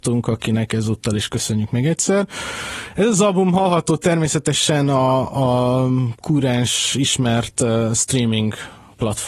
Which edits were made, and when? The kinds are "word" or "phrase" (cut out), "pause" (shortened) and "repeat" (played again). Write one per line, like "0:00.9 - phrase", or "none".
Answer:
none